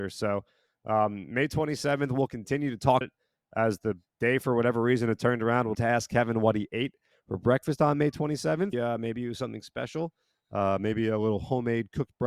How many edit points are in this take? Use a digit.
3